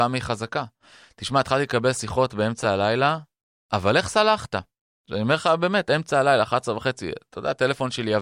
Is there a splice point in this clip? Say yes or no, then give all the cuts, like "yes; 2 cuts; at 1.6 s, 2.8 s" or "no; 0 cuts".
no; 0 cuts